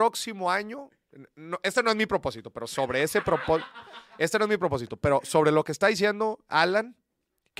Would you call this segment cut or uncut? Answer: uncut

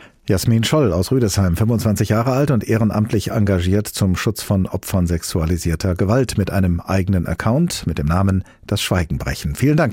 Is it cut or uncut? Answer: uncut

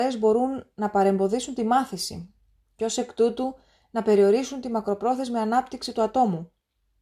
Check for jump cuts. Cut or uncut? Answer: uncut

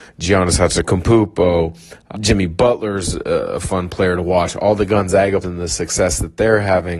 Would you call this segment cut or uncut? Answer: cut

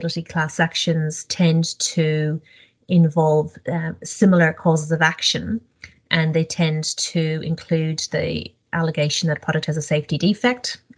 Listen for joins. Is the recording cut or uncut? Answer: uncut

